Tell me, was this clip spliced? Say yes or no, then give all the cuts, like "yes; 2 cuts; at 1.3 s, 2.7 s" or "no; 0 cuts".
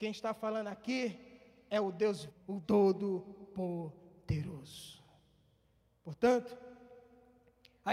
yes; 2 cuts; at 2.3 s, 2.6 s